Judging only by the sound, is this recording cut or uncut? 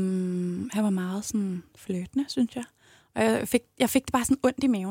uncut